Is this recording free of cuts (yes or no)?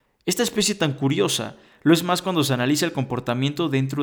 yes